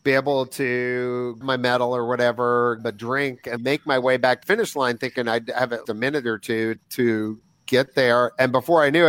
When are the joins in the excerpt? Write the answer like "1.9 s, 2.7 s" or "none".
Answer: 1.4 s, 2.8 s, 3.6 s, 4.4 s, 5.8 s, 6.8 s